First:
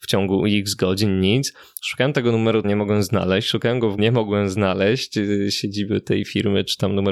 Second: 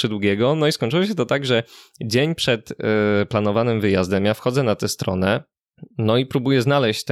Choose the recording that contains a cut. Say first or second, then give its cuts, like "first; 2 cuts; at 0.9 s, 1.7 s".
first; 2 cuts; at 2.6 s, 4.0 s